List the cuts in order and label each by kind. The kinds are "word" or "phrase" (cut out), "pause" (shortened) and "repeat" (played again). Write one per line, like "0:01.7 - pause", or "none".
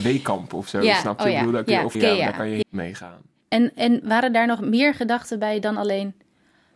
0:01.9 - word
0:02.6 - phrase